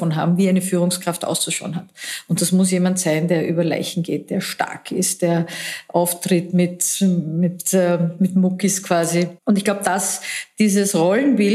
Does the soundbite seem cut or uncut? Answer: cut